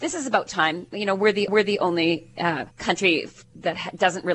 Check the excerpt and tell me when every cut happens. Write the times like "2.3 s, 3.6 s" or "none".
1.5 s, 2.7 s

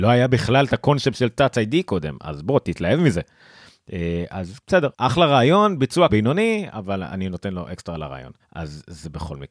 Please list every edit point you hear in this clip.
4.6 s, 4.9 s, 6.1 s, 8.4 s

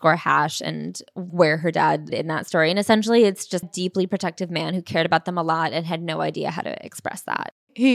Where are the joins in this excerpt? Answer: 2.1 s, 3.6 s

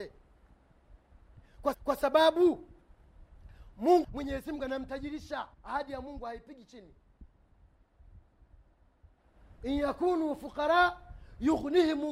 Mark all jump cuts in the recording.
1.7 s, 4.0 s, 5.5 s

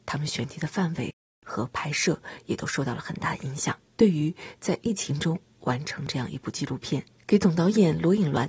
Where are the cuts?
3.9 s

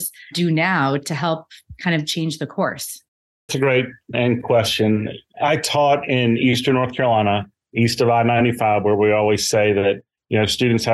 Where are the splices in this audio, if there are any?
3.5 s, 4.1 s

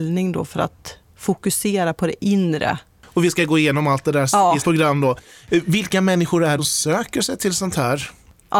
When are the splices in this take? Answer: 4.6 s, 6.6 s

